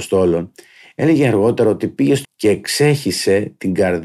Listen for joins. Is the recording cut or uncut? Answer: cut